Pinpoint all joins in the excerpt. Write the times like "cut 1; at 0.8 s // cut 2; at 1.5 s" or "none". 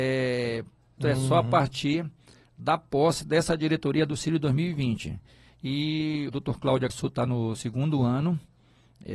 cut 1; at 1.0 s // cut 2; at 6.3 s // cut 3; at 6.9 s // cut 4; at 7.6 s

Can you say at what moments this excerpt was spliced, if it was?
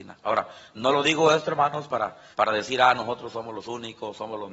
cut 1; at 2.3 s

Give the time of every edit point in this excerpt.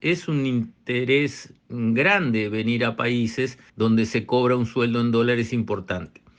cut 1; at 3.7 s

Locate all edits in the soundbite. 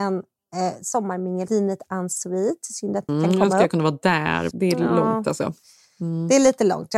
cut 1; at 1.5 s // cut 2; at 3.1 s // cut 3; at 4.5 s

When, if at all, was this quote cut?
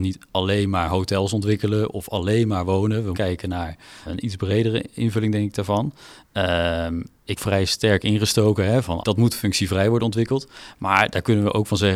cut 1; at 3.1 s // cut 2; at 4.0 s // cut 3; at 7.4 s // cut 4; at 9.0 s

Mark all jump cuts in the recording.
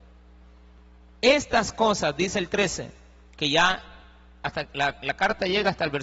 none

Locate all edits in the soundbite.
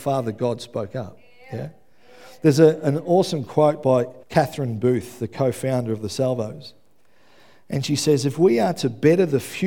cut 1; at 4.2 s

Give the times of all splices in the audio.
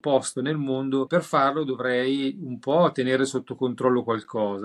cut 1; at 1.1 s

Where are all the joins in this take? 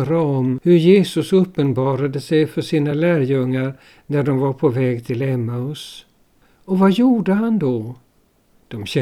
none

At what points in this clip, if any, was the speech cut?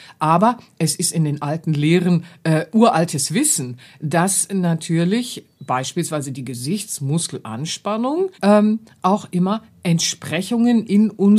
cut 1; at 8.3 s

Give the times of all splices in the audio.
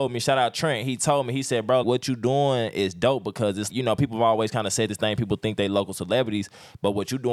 cut 1; at 1.8 s // cut 2; at 3.7 s

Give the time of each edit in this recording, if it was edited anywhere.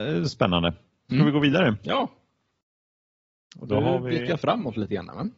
none

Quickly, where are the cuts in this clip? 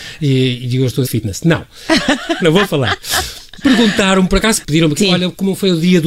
cut 1; at 1.0 s // cut 2; at 2.4 s // cut 3; at 3.6 s // cut 4; at 4.6 s // cut 5; at 5.0 s

